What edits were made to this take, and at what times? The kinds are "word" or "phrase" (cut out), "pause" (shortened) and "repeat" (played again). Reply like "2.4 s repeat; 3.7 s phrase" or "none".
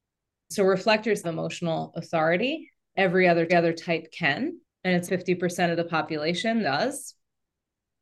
1.2 s phrase; 2.9 s word; 3.5 s repeat; 4.6 s pause; 5.1 s word; 6.6 s word